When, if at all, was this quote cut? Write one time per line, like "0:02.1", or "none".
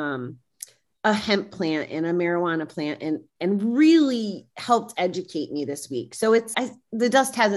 0:06.5